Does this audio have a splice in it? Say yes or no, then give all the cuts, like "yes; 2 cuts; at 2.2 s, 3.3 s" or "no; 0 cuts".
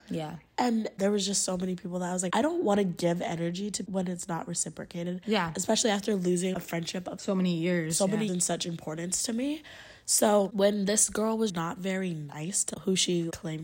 yes; 4 cuts; at 3.8 s, 7.2 s, 8.3 s, 11.5 s